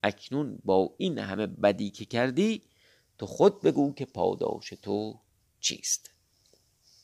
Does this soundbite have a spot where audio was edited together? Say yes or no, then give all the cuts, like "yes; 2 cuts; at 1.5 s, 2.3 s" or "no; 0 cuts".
no; 0 cuts